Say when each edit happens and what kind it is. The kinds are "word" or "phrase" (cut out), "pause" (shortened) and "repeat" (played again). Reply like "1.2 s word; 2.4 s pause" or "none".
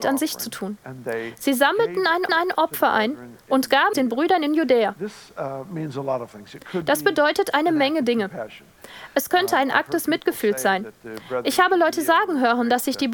2.3 s repeat; 3.9 s word